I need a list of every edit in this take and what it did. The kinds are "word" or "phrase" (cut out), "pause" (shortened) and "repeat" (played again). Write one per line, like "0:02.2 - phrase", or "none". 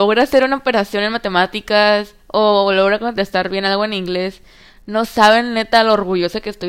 none

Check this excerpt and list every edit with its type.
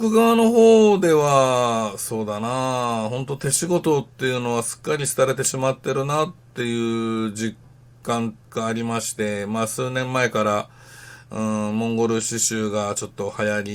0:08.4 - pause

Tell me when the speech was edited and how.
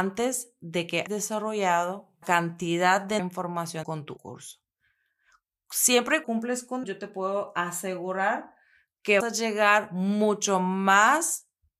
0:01.1 - word
0:02.2 - word
0:03.2 - word
0:03.8 - word
0:04.2 - word
0:06.2 - word
0:06.8 - word
0:09.2 - word

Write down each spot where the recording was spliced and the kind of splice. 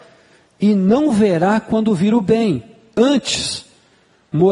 none

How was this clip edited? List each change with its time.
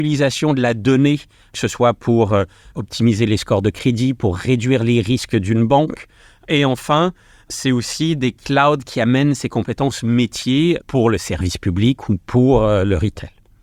none

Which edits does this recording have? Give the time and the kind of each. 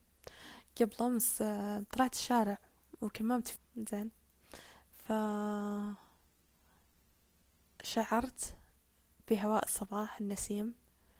0:03.6 - word

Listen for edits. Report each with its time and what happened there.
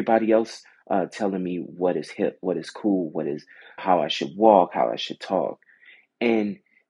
0:03.8 - word

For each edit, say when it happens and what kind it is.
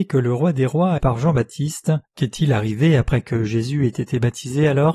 0:01.0 - phrase
0:02.1 - pause

